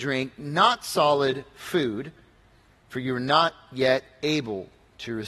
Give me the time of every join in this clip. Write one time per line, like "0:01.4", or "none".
none